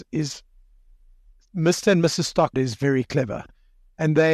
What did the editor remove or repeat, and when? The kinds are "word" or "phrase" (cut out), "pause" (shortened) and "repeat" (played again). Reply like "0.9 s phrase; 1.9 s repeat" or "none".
2.5 s word